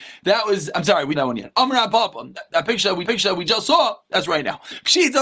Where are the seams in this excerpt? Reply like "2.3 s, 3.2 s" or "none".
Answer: 1.2 s, 3.1 s